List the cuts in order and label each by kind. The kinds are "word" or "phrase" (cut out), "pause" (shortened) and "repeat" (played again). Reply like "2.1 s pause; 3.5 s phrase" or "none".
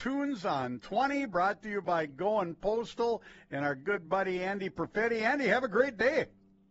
none